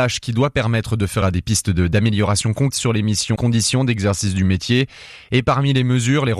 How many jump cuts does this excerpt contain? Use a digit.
3